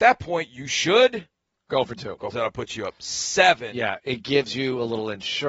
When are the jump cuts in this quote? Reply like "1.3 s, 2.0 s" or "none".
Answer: 2.3 s